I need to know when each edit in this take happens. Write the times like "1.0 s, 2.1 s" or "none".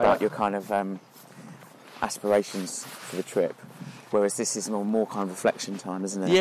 none